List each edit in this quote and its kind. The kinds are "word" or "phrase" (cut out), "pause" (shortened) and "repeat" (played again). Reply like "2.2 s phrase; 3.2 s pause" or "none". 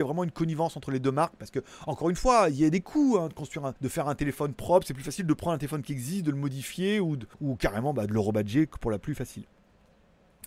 3.8 s pause; 7.3 s pause